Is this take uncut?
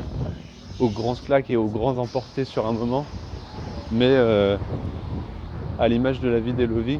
yes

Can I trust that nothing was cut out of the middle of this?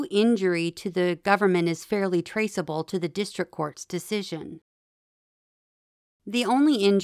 yes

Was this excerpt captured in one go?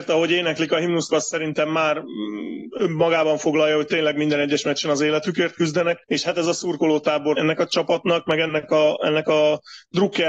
no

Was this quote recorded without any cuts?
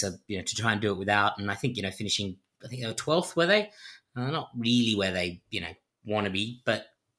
yes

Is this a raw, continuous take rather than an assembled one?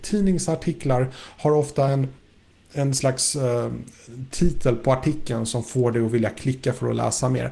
yes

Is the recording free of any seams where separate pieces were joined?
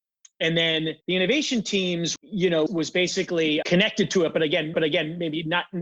no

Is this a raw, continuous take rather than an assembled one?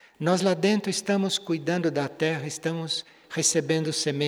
yes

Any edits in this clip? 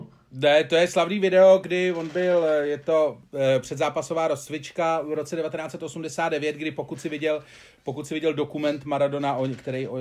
no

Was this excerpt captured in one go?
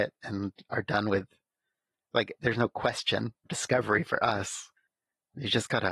no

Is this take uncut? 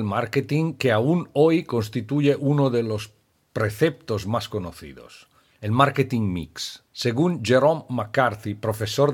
no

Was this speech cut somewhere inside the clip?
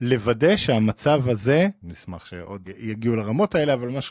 yes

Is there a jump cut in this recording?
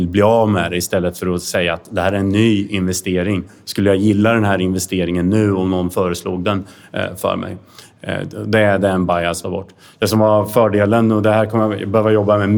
yes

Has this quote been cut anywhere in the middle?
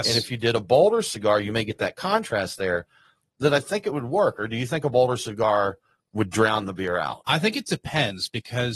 no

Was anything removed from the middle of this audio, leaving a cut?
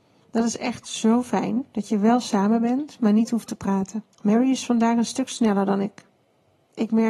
yes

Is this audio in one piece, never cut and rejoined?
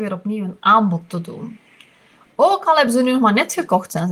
yes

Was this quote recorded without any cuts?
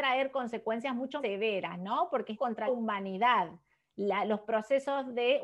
no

